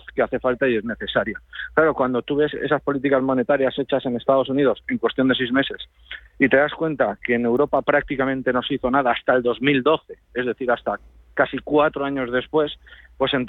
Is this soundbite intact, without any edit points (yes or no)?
yes